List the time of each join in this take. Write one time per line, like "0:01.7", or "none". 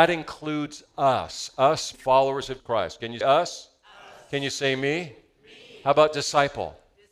0:01.9
0:02.6
0:03.2